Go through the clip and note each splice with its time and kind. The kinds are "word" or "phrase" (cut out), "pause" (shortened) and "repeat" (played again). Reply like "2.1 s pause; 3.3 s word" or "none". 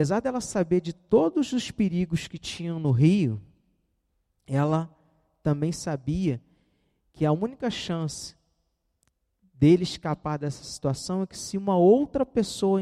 none

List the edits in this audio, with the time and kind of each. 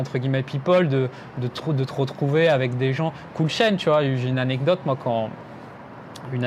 none

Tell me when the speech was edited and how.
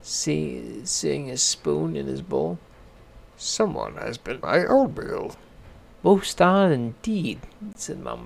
4.4 s word; 5.9 s pause

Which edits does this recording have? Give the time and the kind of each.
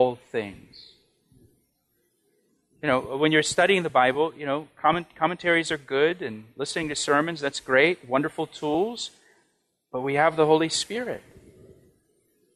none

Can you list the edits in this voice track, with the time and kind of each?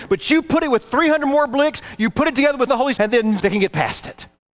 2.7 s phrase; 3.0 s word; 3.4 s word

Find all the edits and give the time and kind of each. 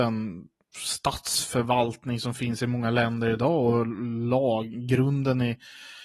none

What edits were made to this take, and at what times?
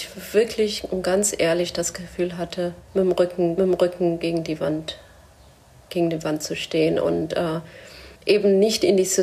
3.6 s repeat; 8.2 s pause

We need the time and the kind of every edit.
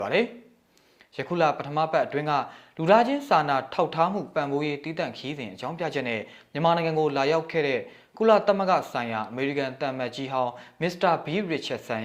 none

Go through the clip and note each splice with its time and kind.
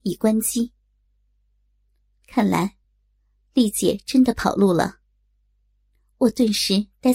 none

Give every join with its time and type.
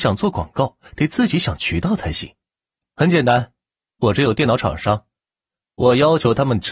2.8 s pause

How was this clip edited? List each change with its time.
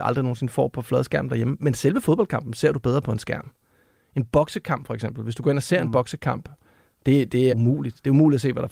7.5 s word

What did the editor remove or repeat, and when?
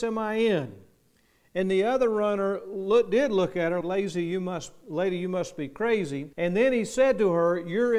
3.8 s word; 6.3 s pause

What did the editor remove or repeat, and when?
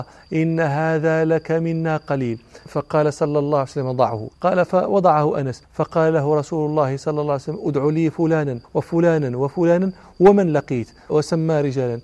4.3 s pause; 5.6 s pause; 8.6 s pause

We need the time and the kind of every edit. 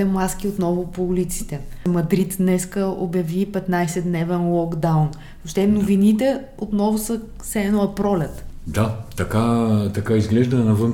none

